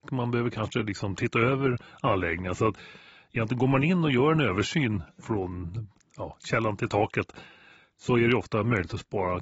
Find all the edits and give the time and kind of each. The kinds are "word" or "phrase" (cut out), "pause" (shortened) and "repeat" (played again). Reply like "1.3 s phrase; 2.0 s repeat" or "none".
none